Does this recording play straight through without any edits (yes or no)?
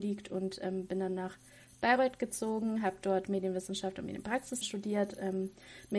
no